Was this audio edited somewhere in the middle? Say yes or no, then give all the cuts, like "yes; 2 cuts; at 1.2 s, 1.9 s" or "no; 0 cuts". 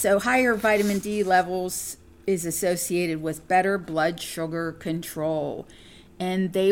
no; 0 cuts